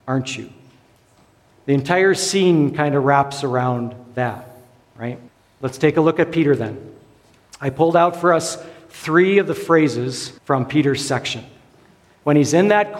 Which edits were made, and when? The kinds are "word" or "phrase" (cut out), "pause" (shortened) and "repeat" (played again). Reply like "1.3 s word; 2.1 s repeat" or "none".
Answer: 5.3 s pause; 10.4 s pause